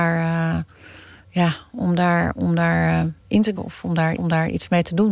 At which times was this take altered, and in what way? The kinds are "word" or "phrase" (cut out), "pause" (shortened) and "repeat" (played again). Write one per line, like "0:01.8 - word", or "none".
0:01.0 - pause
0:02.4 - word
0:03.2 - pause
0:03.6 - word
0:04.2 - repeat